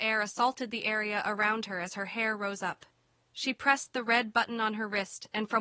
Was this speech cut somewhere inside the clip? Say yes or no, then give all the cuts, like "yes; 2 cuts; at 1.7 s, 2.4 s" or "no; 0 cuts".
no; 0 cuts